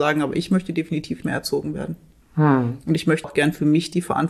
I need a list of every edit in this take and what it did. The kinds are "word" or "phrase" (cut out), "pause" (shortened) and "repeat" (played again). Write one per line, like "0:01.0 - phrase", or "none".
0:01.2 - word
0:03.2 - word